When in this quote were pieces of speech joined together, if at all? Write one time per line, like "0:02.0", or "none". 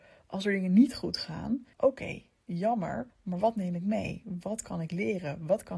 0:01.7
0:03.1